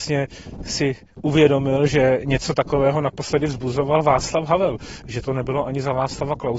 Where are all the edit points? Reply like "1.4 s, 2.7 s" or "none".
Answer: none